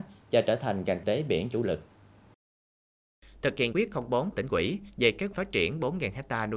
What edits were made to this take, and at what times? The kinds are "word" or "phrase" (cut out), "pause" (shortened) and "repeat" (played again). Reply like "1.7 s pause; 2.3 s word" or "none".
1.0 s word; 3.7 s word; 4.3 s word; 5.3 s word